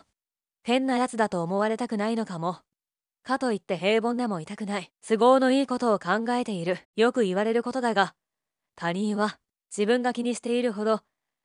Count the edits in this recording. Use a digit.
2